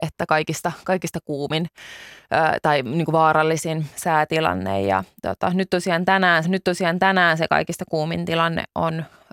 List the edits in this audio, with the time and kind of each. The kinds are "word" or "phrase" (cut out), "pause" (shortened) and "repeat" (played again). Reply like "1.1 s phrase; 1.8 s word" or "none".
6.4 s repeat